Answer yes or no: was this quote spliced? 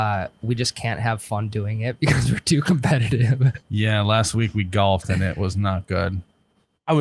no